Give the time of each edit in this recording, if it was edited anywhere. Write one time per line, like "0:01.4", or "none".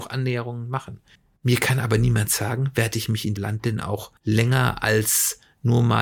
0:01.2
0:03.4
0:04.2